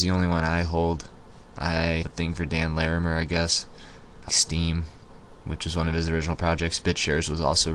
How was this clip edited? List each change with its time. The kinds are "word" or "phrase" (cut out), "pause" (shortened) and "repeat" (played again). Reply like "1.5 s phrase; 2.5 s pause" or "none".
2.0 s word; 4.3 s word